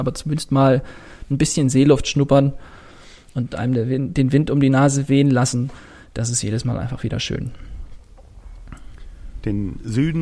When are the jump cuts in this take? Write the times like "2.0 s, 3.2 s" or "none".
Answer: none